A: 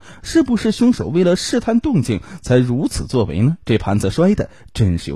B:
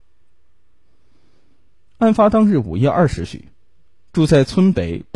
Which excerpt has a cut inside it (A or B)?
A